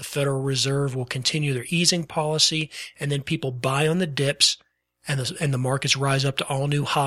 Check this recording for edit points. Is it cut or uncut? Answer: uncut